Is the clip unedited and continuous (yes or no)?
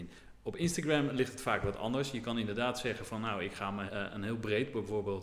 no